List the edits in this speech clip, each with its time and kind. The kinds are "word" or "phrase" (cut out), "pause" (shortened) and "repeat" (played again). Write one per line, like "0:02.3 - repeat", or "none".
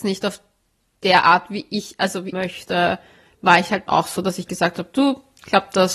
0:02.3 - phrase
0:03.9 - word